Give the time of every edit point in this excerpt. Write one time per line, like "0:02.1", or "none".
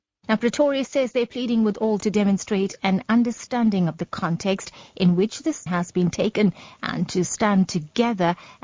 0:02.0
0:05.7